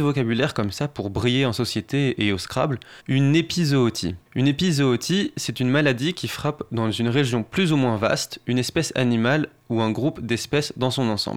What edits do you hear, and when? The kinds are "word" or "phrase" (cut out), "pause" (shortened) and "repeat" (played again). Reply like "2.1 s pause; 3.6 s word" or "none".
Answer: 3.0 s pause; 4.3 s pause